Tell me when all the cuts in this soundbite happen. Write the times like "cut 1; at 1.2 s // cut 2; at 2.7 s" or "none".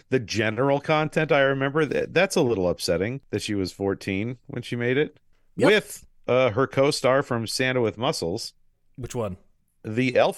none